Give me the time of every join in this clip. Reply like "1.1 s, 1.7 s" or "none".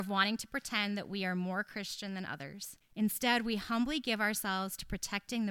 2.8 s